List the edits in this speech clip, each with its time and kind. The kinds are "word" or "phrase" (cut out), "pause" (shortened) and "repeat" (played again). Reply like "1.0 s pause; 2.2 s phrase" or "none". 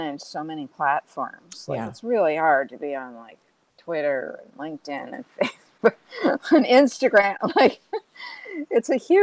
none